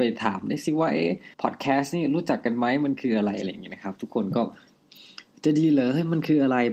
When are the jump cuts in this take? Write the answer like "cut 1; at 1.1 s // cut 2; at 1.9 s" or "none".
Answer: cut 1; at 1.3 s